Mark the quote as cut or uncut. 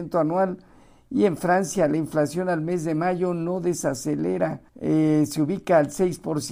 cut